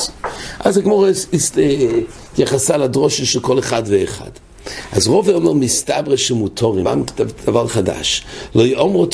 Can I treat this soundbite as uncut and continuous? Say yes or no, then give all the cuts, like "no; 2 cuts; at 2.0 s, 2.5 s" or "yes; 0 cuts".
no; 1 cut; at 6.8 s